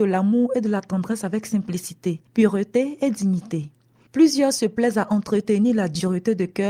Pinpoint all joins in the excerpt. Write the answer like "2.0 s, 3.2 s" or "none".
none